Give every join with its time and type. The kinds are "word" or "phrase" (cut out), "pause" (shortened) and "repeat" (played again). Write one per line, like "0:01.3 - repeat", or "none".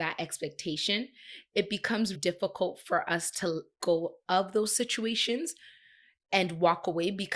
0:02.1 - word
0:03.8 - word